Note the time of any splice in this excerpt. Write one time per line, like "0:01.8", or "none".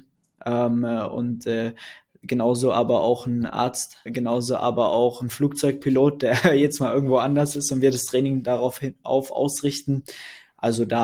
0:04.1